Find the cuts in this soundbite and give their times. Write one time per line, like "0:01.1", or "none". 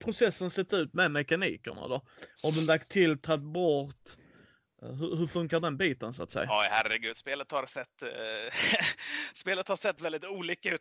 none